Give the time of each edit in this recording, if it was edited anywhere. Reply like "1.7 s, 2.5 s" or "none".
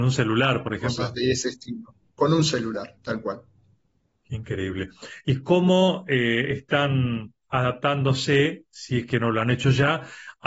2.0 s, 3.0 s